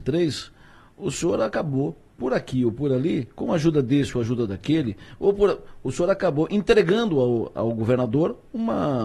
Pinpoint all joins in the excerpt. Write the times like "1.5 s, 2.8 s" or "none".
none